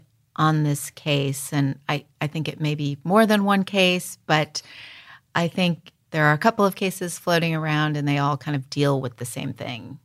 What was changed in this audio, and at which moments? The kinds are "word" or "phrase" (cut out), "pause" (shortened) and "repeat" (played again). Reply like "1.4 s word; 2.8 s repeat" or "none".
none